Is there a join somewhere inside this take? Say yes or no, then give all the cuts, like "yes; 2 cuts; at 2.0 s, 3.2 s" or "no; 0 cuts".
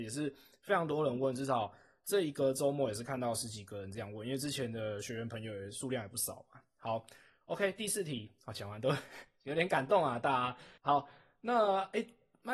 yes; 1 cut; at 10.8 s